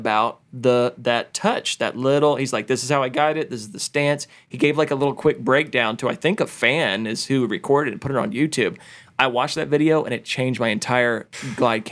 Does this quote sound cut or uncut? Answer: uncut